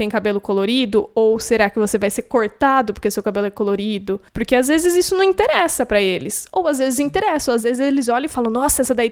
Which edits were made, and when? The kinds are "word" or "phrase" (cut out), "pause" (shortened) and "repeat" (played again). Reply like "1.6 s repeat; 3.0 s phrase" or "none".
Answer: 4.3 s pause